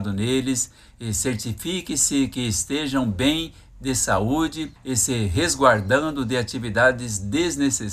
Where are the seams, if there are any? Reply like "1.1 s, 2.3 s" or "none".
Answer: 4.8 s